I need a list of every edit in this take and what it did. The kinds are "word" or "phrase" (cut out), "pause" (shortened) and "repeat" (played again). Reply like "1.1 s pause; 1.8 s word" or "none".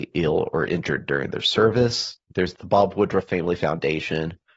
2.2 s pause